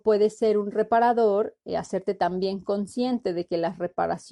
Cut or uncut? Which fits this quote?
uncut